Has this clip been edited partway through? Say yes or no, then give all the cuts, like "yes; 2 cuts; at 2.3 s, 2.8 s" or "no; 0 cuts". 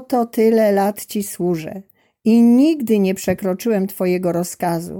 no; 0 cuts